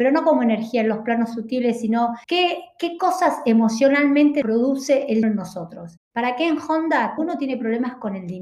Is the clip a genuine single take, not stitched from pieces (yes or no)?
no